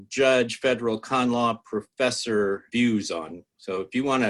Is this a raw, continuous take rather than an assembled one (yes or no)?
no